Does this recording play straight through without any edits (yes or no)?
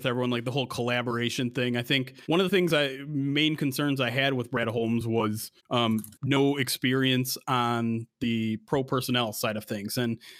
no